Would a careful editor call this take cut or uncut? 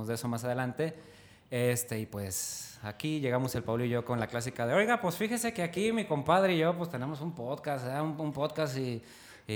uncut